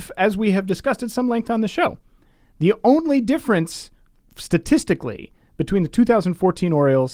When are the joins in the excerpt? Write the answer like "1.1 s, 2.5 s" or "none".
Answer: none